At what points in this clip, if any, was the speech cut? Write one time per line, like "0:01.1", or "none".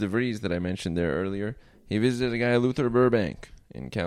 none